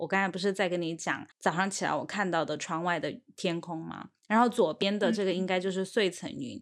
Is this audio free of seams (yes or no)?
no